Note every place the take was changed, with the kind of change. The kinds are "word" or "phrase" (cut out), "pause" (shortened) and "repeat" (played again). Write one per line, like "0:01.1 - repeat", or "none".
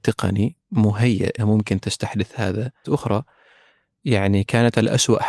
0:01.4 - word
0:02.8 - phrase